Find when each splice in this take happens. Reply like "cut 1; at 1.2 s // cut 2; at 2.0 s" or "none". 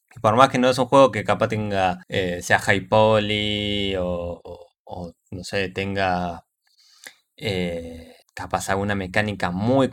cut 1; at 2.0 s // cut 2; at 4.8 s // cut 3; at 8.2 s